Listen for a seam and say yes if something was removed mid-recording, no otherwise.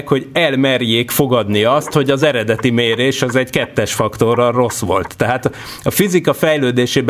no